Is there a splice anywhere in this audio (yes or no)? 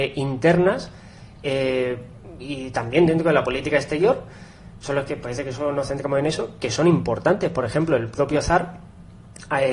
no